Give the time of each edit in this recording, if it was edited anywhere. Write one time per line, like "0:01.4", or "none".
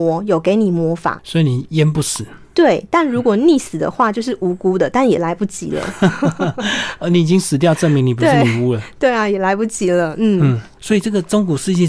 none